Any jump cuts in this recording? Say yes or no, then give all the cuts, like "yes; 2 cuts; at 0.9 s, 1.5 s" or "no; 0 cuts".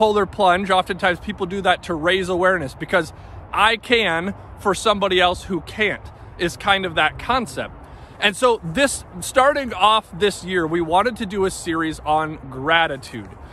no; 0 cuts